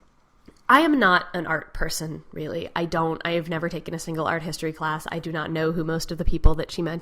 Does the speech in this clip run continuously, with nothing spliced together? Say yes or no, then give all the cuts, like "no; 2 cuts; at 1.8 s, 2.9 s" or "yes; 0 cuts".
yes; 0 cuts